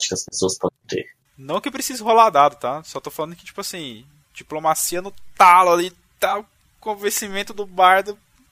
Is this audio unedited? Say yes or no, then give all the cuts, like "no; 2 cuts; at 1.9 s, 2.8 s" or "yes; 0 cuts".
no; 1 cut; at 1.2 s